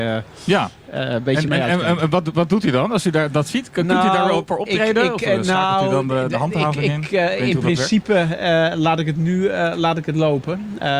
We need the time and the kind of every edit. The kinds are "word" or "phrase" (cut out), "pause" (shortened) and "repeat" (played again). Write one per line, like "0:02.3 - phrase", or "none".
none

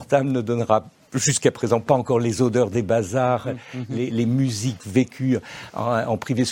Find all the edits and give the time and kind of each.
none

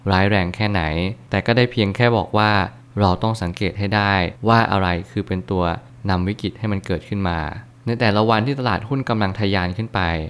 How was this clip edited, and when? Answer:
0:04.4 - pause

